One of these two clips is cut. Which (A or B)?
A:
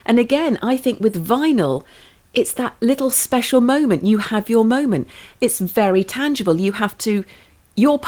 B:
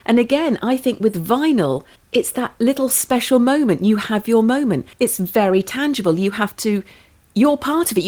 B